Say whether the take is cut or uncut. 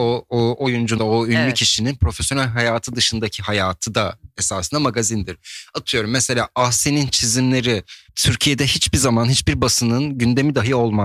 cut